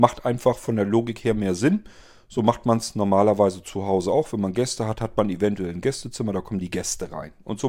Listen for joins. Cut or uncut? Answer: uncut